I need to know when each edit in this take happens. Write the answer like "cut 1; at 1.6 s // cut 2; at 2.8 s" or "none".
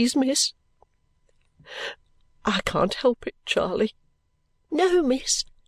none